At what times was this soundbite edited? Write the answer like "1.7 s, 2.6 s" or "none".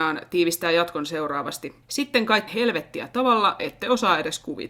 1.8 s, 2.5 s, 3.6 s